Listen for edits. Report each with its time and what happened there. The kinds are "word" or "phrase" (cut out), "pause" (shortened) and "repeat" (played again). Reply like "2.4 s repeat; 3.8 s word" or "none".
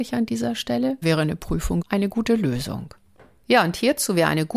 1.0 s word; 1.8 s word; 3.2 s pause